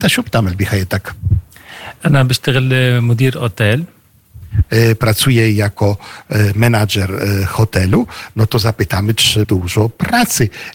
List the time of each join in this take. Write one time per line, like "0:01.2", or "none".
0:09.4

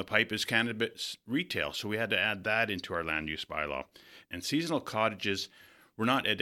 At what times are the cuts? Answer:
none

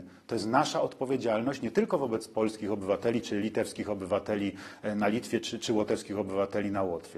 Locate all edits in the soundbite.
none

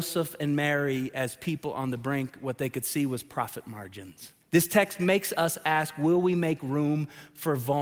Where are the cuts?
0:04.4

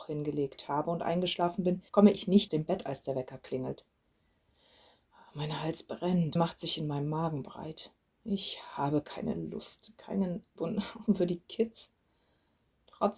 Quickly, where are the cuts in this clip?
0:01.9
0:02.5
0:06.4
0:10.6
0:11.1

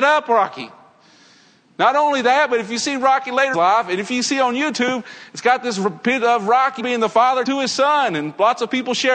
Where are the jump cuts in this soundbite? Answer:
0:03.5
0:06.8
0:07.5

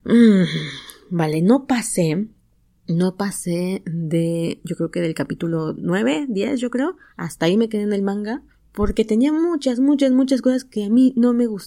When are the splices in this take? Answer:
0:08.5

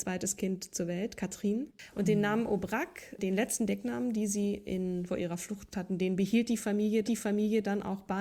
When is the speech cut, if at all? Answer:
0:05.1
0:05.7
0:07.0

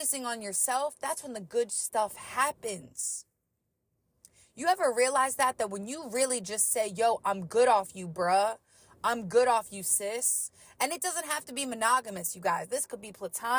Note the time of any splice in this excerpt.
none

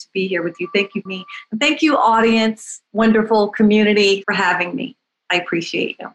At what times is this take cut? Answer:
0:01.1
0:02.9
0:04.2

